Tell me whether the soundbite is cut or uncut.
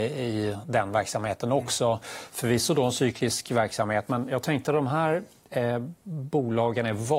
uncut